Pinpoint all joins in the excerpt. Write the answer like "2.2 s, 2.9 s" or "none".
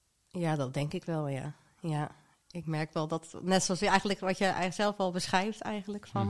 none